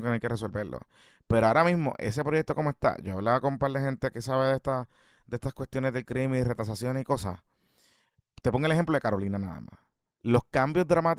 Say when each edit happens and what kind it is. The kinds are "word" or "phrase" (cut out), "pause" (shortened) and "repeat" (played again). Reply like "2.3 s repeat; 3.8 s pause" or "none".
none